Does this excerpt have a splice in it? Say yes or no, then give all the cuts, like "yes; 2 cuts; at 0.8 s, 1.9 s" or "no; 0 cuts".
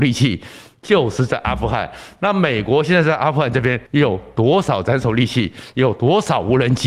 yes; 1 cut; at 3.9 s